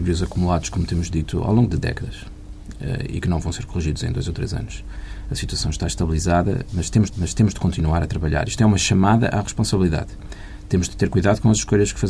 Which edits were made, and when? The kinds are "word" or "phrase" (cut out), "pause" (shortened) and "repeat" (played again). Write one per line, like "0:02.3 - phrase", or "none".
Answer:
0:07.1 - repeat

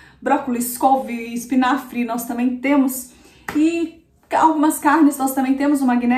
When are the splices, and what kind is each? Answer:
none

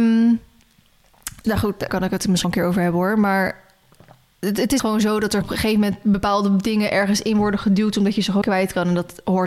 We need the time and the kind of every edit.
0:01.4 - word
0:01.9 - word
0:02.4 - word
0:04.8 - word
0:05.4 - word
0:08.4 - word

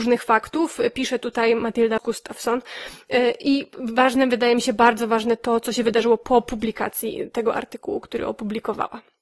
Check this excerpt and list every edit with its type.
0:02.0 - word

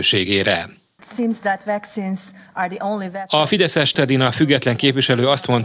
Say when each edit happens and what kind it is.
0:03.9 - word

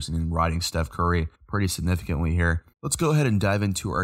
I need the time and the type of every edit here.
0:01.3 - pause
0:02.7 - pause

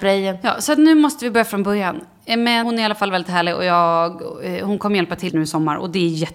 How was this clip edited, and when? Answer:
0:02.6 - word
0:05.3 - word

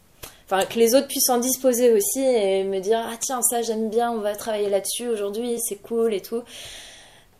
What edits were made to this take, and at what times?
none

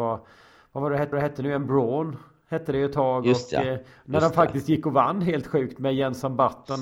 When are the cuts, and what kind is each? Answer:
0:01.1 - repeat

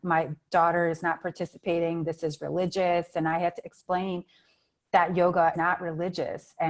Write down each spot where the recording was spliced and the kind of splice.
0:05.5 - word

